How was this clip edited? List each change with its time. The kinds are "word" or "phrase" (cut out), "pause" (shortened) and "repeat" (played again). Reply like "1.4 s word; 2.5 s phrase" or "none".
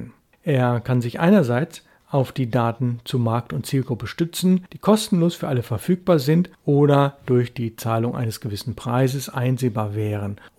none